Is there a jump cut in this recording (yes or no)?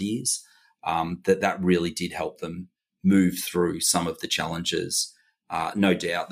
no